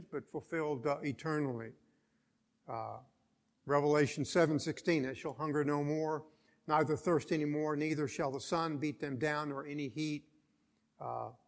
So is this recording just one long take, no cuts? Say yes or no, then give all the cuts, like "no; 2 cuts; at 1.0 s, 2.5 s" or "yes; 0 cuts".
yes; 0 cuts